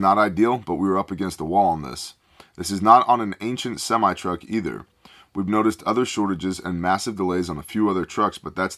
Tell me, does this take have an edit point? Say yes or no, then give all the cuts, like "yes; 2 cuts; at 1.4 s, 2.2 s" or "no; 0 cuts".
no; 0 cuts